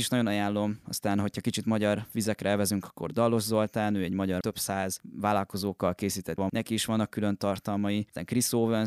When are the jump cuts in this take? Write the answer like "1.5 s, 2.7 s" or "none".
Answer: 4.4 s, 6.4 s